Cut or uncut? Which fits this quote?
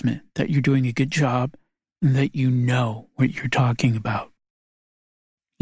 uncut